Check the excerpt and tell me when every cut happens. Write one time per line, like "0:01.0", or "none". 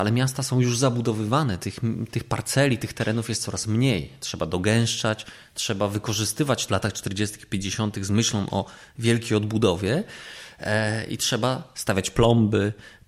0:02.1
0:06.7